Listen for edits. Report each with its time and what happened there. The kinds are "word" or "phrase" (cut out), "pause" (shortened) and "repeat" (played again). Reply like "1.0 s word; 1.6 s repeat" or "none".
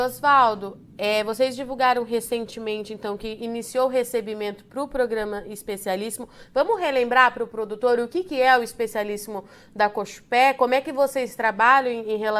none